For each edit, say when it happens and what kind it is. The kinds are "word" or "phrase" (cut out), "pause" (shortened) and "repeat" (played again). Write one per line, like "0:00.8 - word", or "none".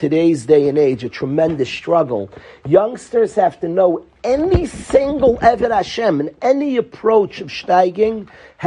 none